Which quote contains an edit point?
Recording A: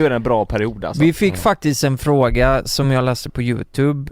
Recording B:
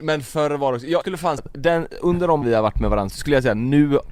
B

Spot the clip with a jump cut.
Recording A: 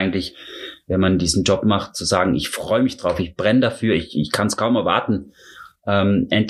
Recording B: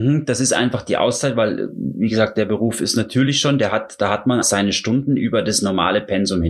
B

